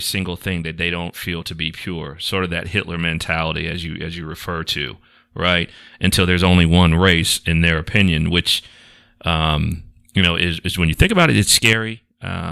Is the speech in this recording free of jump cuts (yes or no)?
yes